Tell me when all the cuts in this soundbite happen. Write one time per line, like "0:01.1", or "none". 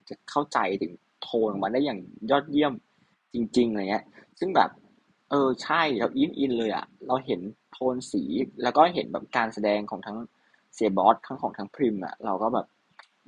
none